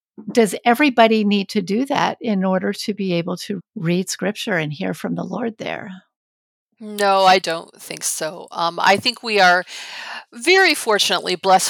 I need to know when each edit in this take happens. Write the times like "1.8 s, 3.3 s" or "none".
3.6 s, 7.4 s